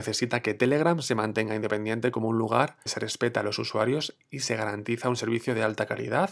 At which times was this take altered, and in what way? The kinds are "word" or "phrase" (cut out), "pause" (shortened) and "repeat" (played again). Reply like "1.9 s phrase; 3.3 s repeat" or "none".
2.9 s word